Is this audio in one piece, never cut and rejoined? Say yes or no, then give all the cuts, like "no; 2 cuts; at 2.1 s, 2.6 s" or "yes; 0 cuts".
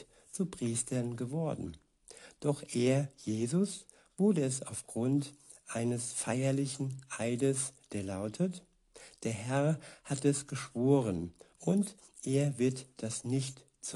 yes; 0 cuts